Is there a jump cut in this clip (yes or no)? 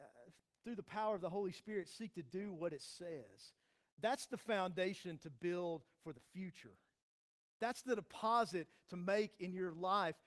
no